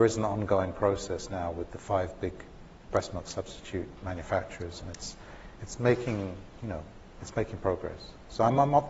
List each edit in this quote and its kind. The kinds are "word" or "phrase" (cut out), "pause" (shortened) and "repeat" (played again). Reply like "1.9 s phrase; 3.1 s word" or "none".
none